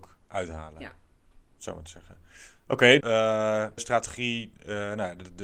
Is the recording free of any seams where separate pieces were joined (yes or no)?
no